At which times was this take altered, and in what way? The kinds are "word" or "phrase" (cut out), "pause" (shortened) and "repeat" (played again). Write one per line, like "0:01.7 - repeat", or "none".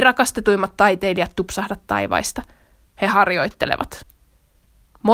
none